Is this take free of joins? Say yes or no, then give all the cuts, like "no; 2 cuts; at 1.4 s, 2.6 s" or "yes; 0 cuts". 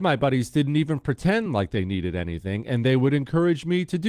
yes; 0 cuts